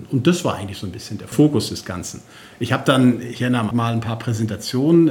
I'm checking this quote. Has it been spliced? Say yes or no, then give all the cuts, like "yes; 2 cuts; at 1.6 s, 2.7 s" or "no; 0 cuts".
yes; 1 cut; at 3.7 s